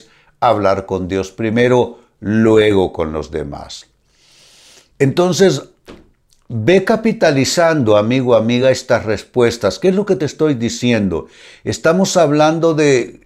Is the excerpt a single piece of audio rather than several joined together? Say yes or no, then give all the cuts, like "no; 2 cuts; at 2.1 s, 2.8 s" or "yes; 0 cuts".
yes; 0 cuts